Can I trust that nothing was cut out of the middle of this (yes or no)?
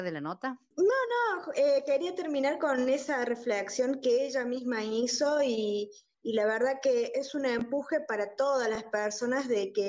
yes